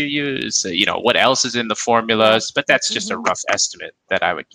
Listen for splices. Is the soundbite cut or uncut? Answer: uncut